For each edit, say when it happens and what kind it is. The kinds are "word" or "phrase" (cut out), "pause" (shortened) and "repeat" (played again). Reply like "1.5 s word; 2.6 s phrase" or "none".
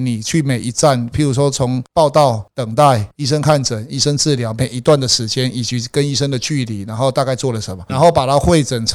7.9 s word